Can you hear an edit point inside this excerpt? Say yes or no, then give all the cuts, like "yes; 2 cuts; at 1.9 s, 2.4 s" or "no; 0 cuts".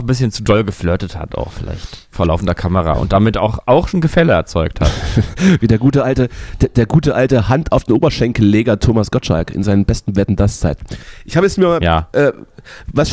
yes; 1 cut; at 3.9 s